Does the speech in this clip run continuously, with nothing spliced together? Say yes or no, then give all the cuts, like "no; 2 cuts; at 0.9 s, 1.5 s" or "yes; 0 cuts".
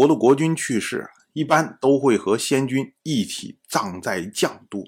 yes; 0 cuts